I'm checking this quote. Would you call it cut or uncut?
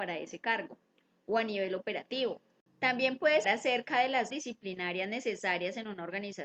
cut